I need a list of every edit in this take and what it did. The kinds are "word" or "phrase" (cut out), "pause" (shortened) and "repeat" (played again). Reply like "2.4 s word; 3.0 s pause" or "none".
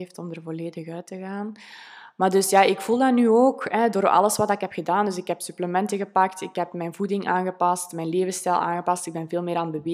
none